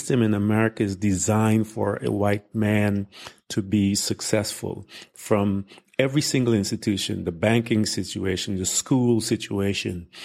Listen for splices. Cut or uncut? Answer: uncut